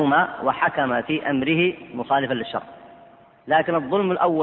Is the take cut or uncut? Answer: uncut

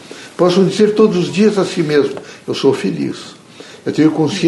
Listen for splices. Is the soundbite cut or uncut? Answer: uncut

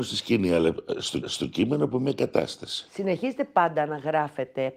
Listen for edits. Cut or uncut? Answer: cut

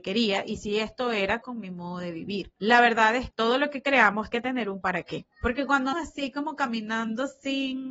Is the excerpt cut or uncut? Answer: cut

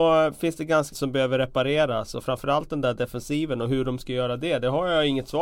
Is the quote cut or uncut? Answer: cut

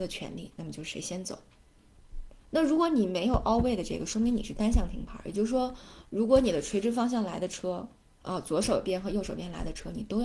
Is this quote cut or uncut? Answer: cut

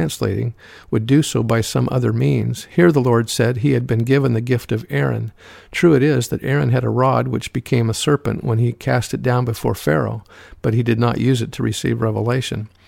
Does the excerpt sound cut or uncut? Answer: uncut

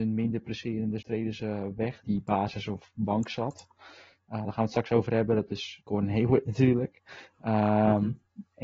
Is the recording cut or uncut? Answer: cut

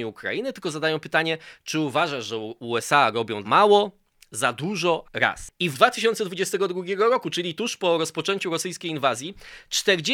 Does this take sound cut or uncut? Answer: cut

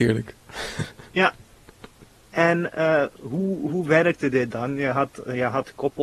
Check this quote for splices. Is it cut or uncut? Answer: uncut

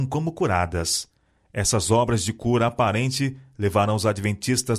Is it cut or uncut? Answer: uncut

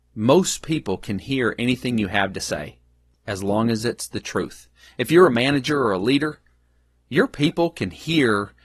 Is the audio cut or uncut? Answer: uncut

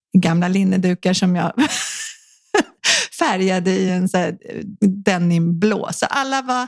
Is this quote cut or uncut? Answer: uncut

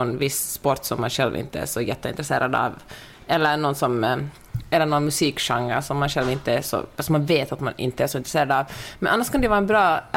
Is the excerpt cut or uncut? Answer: uncut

